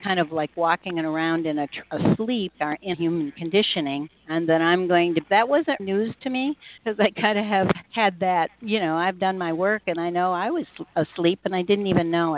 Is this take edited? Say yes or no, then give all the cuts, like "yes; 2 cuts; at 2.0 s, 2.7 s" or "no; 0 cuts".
yes; 8 cuts; at 1.8 s, 2.5 s, 2.9 s, 4.2 s, 5.2 s, 5.8 s, 6.8 s, 7.9 s